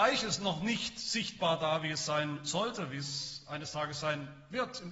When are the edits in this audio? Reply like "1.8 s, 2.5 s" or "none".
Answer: none